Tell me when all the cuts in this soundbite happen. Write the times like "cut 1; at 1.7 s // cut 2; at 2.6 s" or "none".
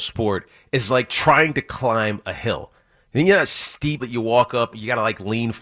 cut 1; at 4.0 s // cut 2; at 4.7 s

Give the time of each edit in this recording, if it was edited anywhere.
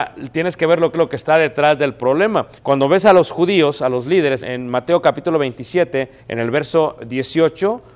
cut 1; at 0.9 s // cut 2; at 2.6 s // cut 3; at 4.4 s // cut 4; at 6.2 s

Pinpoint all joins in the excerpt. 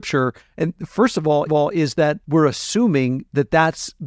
cut 1; at 1.5 s // cut 2; at 2.2 s

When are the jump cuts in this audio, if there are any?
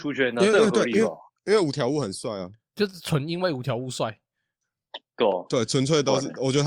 none

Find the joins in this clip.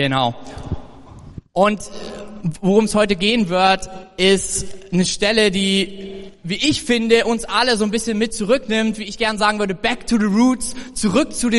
none

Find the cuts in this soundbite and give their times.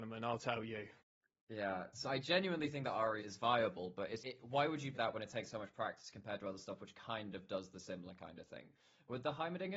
cut 1; at 2.1 s // cut 2; at 3.2 s // cut 3; at 4.2 s // cut 4; at 4.9 s

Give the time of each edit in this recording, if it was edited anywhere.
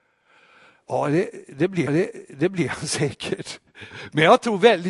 cut 1; at 1.9 s

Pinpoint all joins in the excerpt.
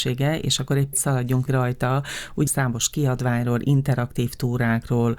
cut 1; at 0.9 s // cut 2; at 1.5 s // cut 3; at 2.5 s

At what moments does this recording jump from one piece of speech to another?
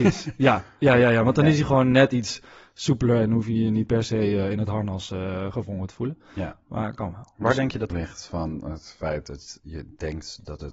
cut 1; at 7.9 s

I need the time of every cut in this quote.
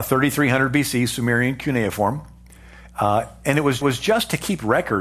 cut 1; at 3.8 s

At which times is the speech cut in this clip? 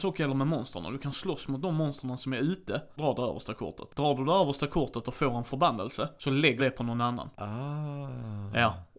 cut 1; at 3.0 s // cut 2; at 6.6 s

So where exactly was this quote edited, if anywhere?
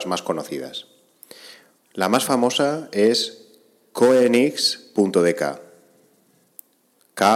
none

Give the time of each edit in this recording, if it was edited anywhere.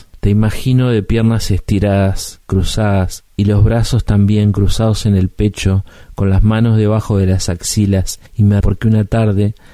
cut 1; at 8.3 s // cut 2; at 8.6 s

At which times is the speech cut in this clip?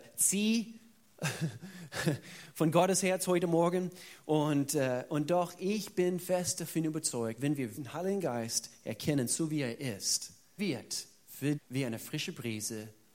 cut 1; at 7.4 s // cut 2; at 7.7 s // cut 3; at 10.6 s // cut 4; at 11.5 s

